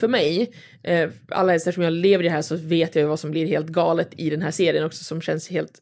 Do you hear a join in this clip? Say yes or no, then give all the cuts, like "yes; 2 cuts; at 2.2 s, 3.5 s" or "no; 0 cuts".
no; 0 cuts